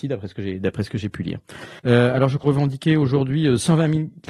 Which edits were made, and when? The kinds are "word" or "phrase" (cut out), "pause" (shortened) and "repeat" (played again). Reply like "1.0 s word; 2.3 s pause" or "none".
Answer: 1.8 s pause; 2.4 s phrase